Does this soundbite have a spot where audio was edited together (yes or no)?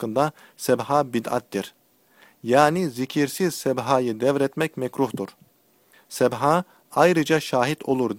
no